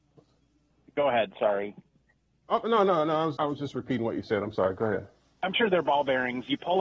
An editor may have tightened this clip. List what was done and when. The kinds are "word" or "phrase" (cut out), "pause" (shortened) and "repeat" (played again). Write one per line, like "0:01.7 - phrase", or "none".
0:03.3 - word
0:05.5 - word